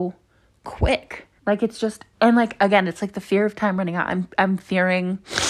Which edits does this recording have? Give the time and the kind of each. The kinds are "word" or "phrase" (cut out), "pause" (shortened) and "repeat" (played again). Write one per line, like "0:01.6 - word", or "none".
0:01.4 - pause
0:02.1 - pause